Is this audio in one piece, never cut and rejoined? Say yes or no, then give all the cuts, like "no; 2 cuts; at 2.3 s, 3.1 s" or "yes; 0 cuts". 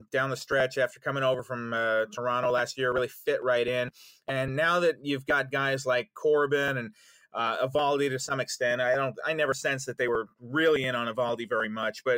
yes; 0 cuts